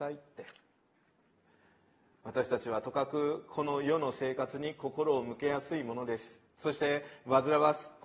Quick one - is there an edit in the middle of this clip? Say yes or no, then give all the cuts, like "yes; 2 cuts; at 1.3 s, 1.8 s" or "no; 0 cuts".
yes; 1 cut; at 6.5 s